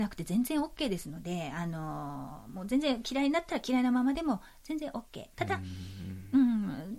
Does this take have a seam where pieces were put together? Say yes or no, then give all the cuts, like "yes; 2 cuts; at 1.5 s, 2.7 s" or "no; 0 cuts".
no; 0 cuts